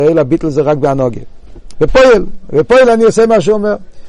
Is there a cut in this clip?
no; 0 cuts

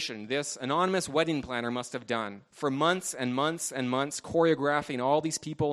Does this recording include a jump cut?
yes; 1 cut; at 2.5 s

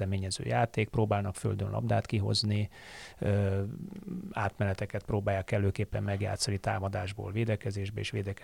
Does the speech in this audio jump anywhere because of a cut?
no; 0 cuts

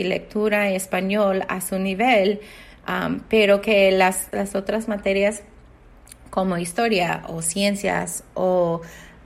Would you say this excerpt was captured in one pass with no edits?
yes; 0 cuts

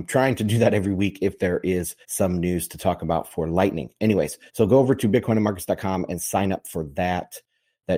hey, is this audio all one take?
no; 2 cuts; at 2.0 s, 4.5 s

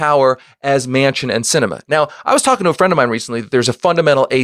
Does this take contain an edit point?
no; 0 cuts

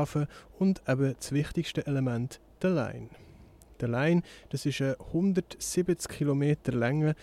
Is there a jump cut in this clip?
no; 0 cuts

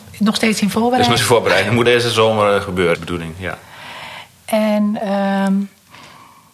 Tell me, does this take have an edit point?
yes; 3 cuts; at 1.2 s, 1.9 s, 2.9 s

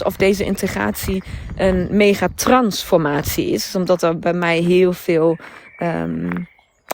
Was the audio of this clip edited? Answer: no; 0 cuts

